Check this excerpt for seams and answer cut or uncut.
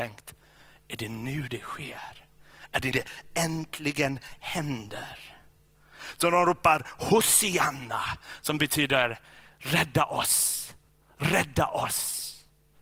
cut